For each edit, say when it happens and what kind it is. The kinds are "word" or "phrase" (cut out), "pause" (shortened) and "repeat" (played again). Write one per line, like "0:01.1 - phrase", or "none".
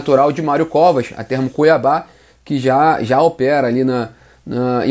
none